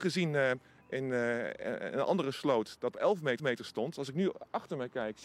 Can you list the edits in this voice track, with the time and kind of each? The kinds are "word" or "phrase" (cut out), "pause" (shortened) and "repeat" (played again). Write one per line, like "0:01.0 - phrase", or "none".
0:02.9 - phrase
0:03.4 - repeat